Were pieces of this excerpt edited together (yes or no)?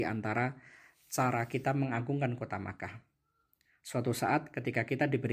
no